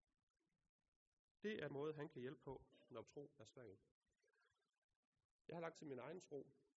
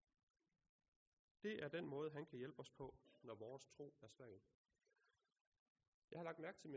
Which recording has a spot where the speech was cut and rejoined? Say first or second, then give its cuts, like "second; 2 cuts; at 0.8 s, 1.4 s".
first; 4 cuts; at 1.7 s, 2.4 s, 3.0 s, 5.7 s